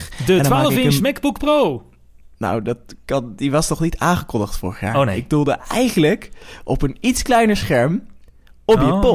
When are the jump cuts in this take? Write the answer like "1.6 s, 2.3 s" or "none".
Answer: 2.3 s